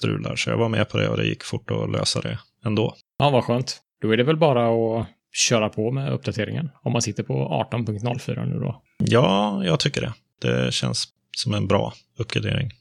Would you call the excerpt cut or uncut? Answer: uncut